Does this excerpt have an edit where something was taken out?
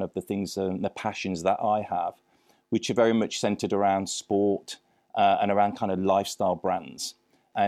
no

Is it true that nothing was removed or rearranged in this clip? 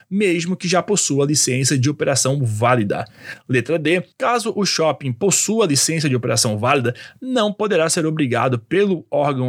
no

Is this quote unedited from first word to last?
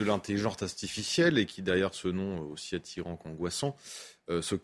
yes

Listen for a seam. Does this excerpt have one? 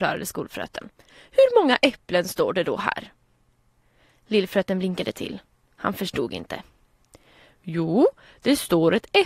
no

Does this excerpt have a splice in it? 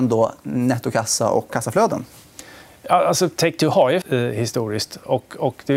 yes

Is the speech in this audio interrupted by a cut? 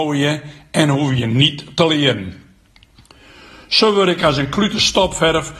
no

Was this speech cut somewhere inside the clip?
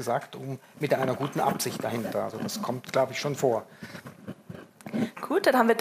no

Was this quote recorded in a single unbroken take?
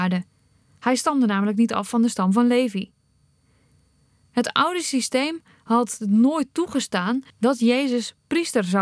yes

